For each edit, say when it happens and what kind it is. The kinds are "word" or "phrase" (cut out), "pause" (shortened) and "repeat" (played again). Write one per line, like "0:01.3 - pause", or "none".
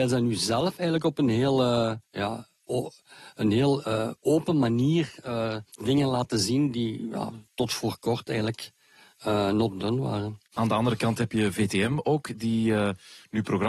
0:02.0 - pause
0:05.7 - pause
0:07.5 - pause
0:10.5 - pause